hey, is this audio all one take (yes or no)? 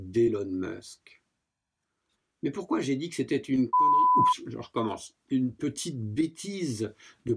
yes